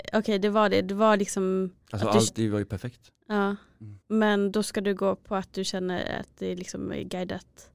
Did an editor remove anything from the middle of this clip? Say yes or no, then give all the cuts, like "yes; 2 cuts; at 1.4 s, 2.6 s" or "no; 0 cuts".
yes; 3 cuts; at 2.3 s, 3.2 s, 4.0 s